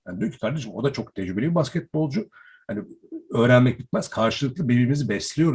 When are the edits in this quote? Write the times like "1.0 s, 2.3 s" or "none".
none